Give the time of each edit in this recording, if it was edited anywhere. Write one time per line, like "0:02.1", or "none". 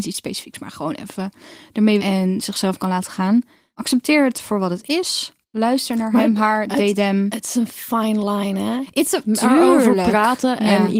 0:02.0

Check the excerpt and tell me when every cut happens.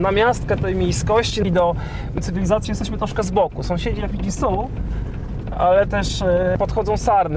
0:01.4
0:02.6
0:04.1
0:05.9

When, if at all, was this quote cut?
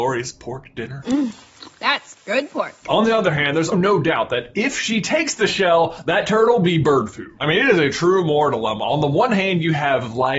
0:03.7

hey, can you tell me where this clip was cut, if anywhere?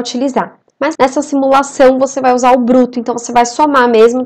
0:00.9

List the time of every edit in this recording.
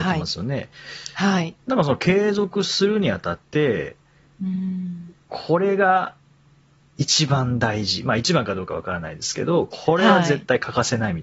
0:01.6

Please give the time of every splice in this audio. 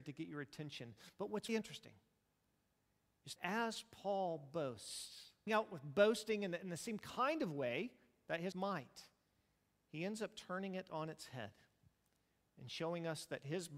0:01.5
0:03.4
0:05.5
0:08.5

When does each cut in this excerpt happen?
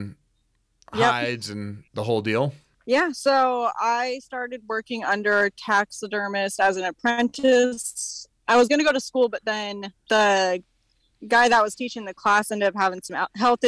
0:01.9
0:02.7
0:10.0

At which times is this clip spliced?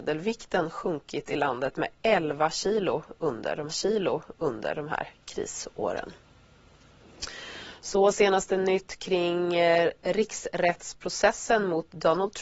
0:03.7

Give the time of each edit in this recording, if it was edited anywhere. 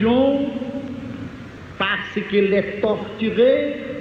none

